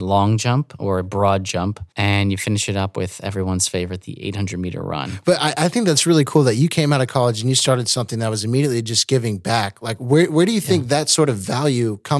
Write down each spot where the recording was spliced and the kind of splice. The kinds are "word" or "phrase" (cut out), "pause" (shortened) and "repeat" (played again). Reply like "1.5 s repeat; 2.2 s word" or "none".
1.9 s pause